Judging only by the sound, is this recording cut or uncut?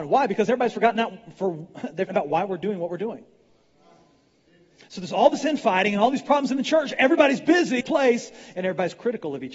cut